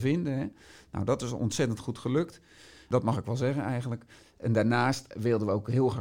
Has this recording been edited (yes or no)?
yes